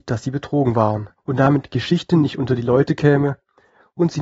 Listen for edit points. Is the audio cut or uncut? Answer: cut